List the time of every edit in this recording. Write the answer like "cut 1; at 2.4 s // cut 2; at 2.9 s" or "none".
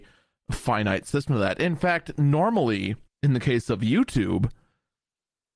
cut 1; at 3.1 s